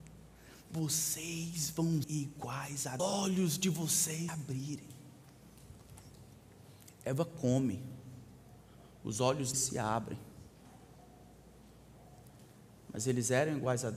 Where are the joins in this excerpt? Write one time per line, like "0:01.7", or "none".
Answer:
0:02.0
0:03.0
0:04.3
0:08.9
0:09.5